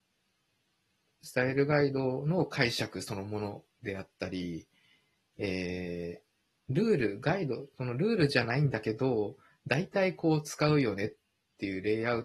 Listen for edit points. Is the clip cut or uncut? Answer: cut